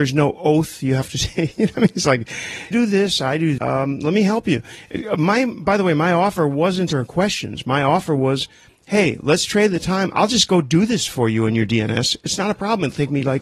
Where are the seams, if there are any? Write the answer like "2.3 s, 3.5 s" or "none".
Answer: 2.7 s, 3.6 s, 6.9 s